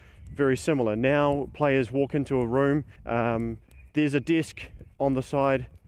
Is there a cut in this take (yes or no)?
yes